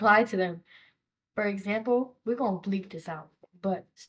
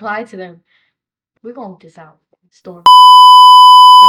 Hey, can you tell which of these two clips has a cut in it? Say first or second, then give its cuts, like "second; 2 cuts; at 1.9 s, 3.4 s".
second; 3 cuts; at 1.4 s, 1.8 s, 2.5 s